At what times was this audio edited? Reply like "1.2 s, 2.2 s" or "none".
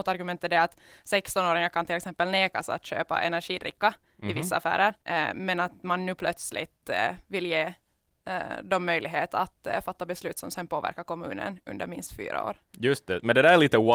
5.0 s, 12.7 s

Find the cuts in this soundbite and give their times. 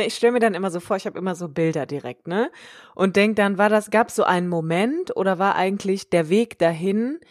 none

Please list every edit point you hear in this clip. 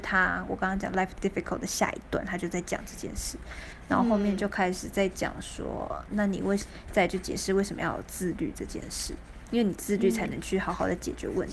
1.2 s, 6.1 s

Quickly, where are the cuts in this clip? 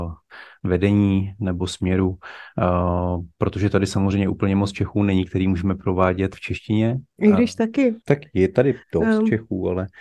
6.3 s, 8.0 s, 8.8 s

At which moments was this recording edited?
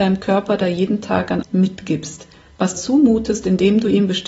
1.4 s, 2.7 s

